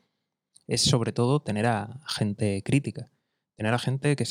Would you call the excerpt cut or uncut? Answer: uncut